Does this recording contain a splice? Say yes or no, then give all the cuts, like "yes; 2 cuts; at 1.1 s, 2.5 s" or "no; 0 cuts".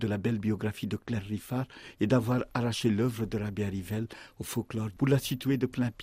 no; 0 cuts